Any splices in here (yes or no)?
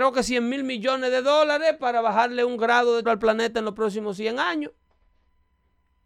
yes